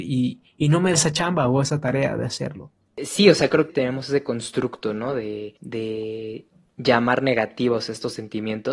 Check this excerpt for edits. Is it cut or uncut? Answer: cut